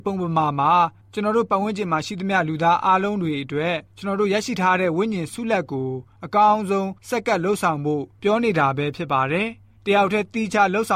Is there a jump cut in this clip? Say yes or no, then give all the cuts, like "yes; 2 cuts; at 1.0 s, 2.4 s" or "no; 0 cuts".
yes; 2 cuts; at 3.9 s, 7.0 s